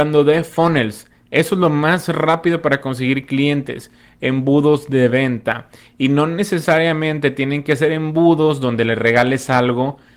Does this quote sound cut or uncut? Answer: uncut